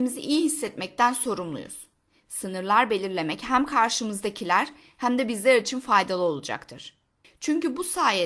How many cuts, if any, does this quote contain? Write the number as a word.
zero